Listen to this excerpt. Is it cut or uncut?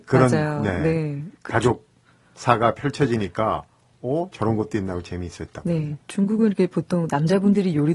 uncut